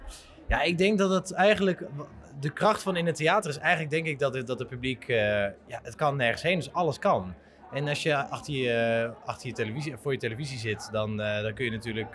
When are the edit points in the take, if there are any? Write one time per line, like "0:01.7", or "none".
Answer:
none